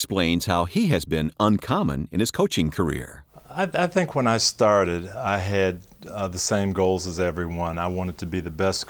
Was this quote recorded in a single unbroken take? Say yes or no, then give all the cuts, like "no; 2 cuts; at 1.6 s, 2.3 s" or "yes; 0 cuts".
yes; 0 cuts